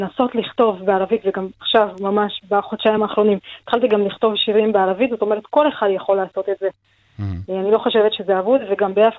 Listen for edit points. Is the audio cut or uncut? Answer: uncut